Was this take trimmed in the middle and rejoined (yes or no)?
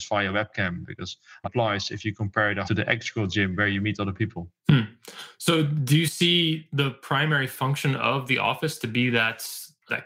yes